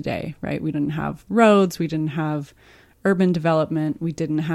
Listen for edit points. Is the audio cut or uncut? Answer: uncut